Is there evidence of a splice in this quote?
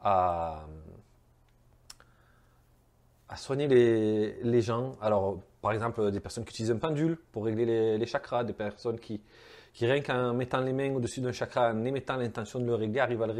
no; 0 cuts

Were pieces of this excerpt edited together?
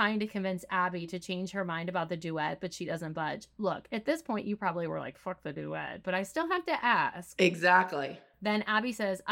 no; 0 cuts

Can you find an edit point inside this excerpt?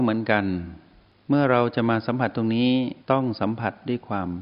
yes; 1 cut; at 3.0 s

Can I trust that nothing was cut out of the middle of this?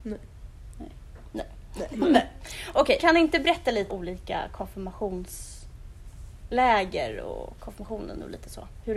no; 2 cuts; at 3.0 s, 3.9 s

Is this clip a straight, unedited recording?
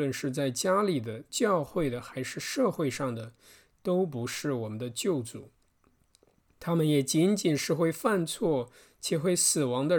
yes; 0 cuts

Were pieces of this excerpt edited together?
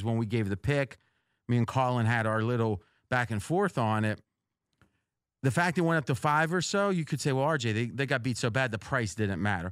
no; 0 cuts

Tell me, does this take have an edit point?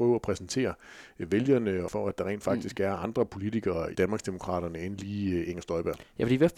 yes; 2 cuts; at 1.9 s, 3.9 s

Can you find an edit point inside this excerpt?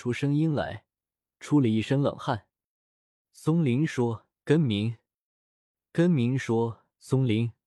no; 0 cuts

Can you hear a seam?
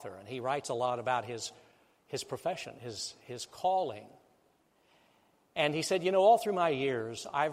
no; 0 cuts

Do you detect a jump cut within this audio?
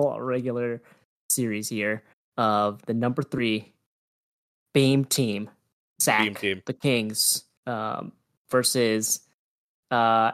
yes; 2 cuts; at 2.1 s, 7.6 s

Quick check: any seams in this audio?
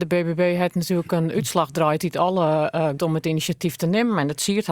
yes; 1 cut; at 3.0 s

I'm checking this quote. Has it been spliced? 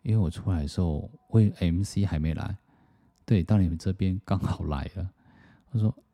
no; 0 cuts

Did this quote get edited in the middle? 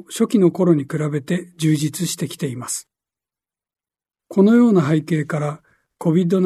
no; 0 cuts

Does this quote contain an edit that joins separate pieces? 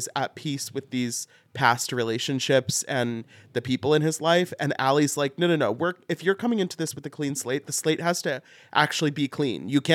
no; 0 cuts

